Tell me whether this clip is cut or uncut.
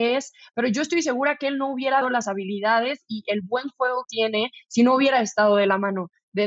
cut